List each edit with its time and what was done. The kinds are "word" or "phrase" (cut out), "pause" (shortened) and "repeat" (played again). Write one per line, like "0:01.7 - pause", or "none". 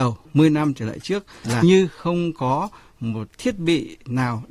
0:01.6 - word
0:03.3 - word